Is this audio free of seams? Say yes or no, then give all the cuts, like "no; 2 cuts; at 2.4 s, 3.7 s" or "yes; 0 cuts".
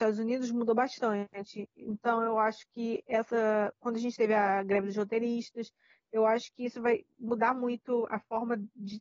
yes; 0 cuts